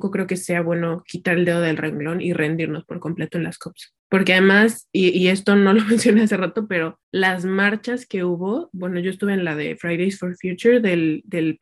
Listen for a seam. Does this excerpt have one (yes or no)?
no